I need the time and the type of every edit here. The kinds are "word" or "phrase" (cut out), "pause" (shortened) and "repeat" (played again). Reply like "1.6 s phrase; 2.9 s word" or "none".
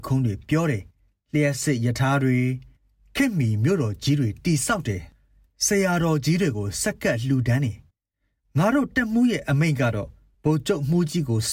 0.9 s pause; 2.8 s pause; 7.9 s pause; 10.3 s pause